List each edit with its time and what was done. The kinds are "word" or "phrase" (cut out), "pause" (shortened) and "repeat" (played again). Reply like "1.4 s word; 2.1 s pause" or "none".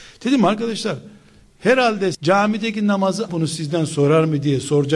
2.1 s word; 3.3 s phrase